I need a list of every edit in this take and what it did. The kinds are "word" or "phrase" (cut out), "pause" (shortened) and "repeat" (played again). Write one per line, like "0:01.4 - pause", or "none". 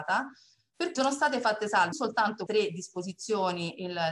0:00.9 - word
0:01.9 - word
0:02.5 - word